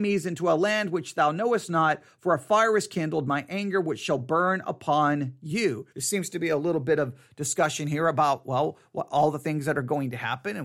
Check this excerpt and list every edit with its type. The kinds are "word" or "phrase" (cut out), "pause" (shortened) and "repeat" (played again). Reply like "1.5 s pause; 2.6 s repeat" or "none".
5.9 s pause